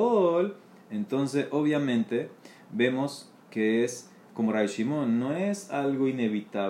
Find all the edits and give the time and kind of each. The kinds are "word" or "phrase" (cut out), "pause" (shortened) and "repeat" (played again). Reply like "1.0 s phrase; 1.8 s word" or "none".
none